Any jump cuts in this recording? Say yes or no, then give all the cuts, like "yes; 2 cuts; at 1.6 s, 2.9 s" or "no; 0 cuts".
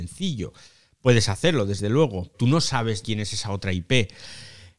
yes; 2 cuts; at 2.3 s, 3.0 s